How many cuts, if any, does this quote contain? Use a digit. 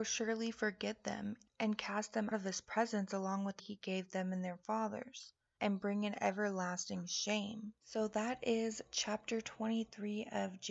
3